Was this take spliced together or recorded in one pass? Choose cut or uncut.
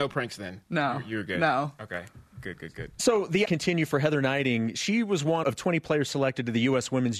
cut